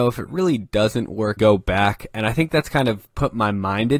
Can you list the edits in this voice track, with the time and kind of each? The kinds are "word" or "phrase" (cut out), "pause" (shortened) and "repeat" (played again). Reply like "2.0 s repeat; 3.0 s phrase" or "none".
1.4 s phrase